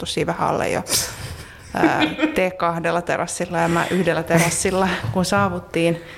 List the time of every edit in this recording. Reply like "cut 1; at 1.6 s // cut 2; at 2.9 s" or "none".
none

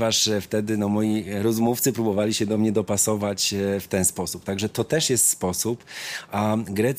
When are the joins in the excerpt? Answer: none

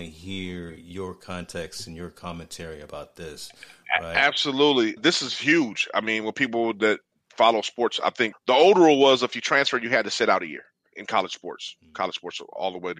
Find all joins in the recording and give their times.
cut 1; at 5.0 s // cut 2; at 8.3 s // cut 3; at 10.9 s

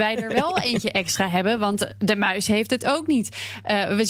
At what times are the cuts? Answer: none

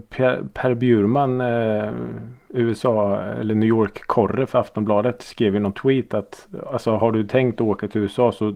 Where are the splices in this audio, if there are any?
none

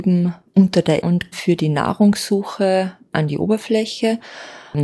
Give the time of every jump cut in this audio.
cut 1; at 1.0 s // cut 2; at 1.3 s

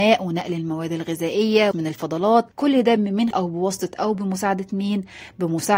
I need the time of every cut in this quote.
cut 1; at 1.7 s // cut 2; at 2.5 s // cut 3; at 3.0 s // cut 4; at 3.3 s // cut 5; at 4.1 s

